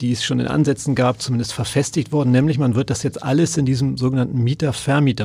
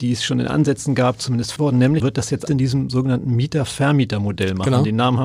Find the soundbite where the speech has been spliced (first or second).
second